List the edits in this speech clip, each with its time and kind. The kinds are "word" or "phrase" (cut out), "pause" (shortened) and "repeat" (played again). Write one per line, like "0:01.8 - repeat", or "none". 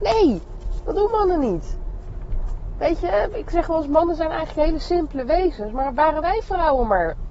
none